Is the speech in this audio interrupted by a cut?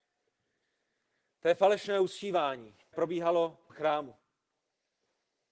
yes; 2 cuts; at 2.9 s, 3.7 s

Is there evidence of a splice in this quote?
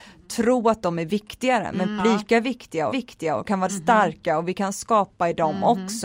yes; 3 cuts; at 2.0 s, 2.9 s, 3.7 s

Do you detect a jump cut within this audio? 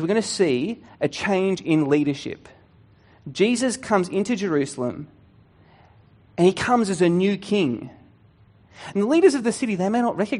no; 0 cuts

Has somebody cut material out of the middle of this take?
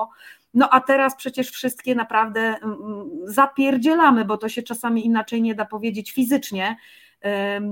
no; 0 cuts

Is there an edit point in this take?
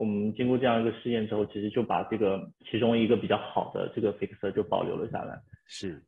yes; 1 cut; at 2.6 s

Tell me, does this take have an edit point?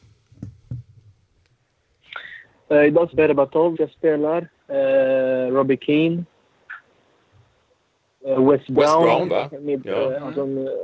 yes; 2 cuts; at 3.1 s, 3.8 s

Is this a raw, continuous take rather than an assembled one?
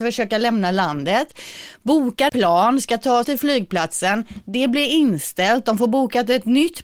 no; 2 cuts; at 2.3 s, 3.2 s

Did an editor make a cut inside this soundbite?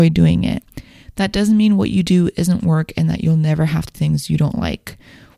yes; 1 cut; at 3.9 s

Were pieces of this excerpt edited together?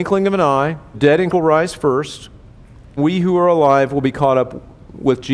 yes; 3 cuts; at 0.9 s, 1.3 s, 3.0 s

